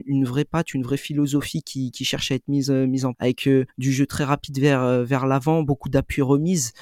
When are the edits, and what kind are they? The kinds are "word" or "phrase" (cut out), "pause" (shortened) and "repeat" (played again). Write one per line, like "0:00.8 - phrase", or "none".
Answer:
0:03.1 - word
0:03.7 - pause